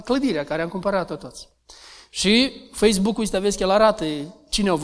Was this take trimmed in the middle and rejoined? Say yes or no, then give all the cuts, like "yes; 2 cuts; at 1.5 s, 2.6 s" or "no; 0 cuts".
no; 0 cuts